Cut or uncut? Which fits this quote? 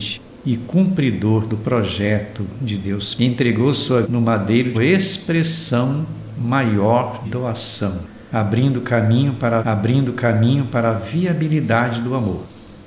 cut